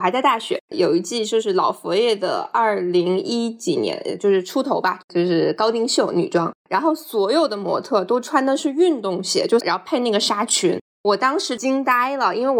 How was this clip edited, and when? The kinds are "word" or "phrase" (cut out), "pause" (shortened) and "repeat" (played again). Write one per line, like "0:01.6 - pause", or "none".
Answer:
0:09.6 - phrase

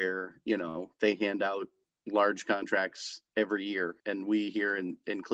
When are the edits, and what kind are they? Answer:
0:03.3 - pause
0:04.0 - pause

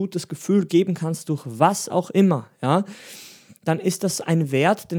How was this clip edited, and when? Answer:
none

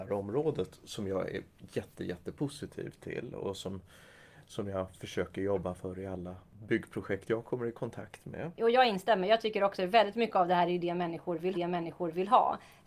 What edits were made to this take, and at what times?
0:11.5 - repeat

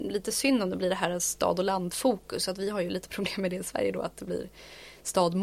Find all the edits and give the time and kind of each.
none

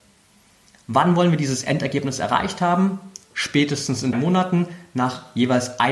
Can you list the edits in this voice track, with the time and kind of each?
0:04.1 - word

